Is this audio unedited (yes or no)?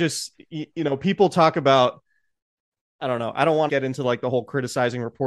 no